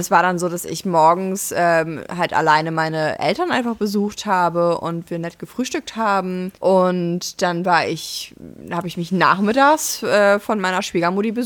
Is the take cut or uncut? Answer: cut